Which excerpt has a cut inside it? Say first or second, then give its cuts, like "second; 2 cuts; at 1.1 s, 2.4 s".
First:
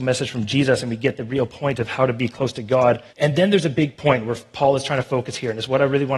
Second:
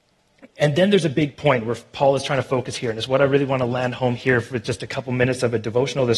first; 1 cut; at 3.1 s